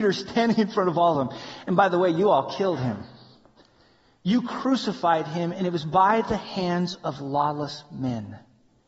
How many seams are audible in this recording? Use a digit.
0